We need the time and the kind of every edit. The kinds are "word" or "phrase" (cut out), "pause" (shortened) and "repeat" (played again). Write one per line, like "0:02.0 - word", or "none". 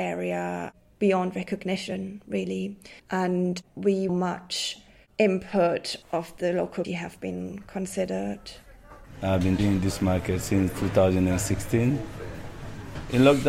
0:03.0 - pause
0:04.1 - phrase
0:06.0 - phrase
0:06.8 - word
0:09.6 - word